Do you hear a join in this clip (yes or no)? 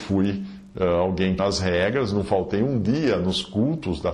yes